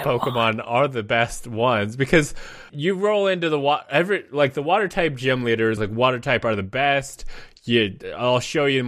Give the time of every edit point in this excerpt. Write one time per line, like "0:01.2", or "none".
0:02.7
0:05.8